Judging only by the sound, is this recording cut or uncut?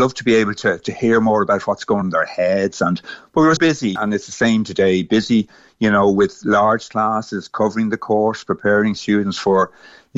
cut